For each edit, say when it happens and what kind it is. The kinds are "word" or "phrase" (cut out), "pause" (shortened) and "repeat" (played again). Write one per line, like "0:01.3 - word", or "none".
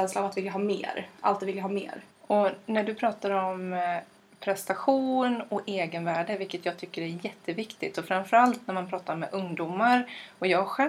0:02.1 - pause
0:04.2 - pause